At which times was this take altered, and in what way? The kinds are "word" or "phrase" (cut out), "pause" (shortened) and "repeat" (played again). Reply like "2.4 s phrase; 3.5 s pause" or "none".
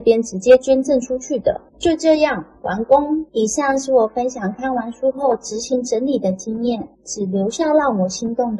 1.7 s pause; 3.3 s pause; 6.9 s pause